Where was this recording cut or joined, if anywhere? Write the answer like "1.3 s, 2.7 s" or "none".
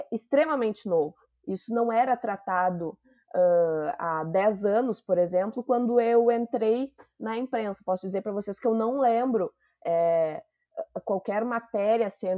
none

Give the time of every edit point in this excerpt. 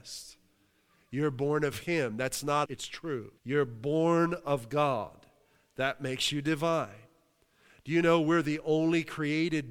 2.6 s, 3.4 s

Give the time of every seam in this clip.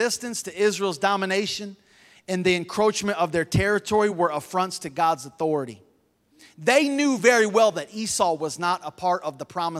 none

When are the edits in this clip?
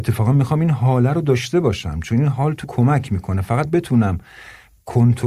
2.6 s, 3.6 s

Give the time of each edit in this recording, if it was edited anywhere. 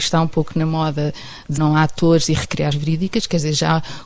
1.6 s, 2.7 s

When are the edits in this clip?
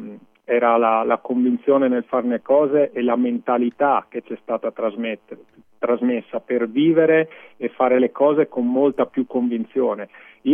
none

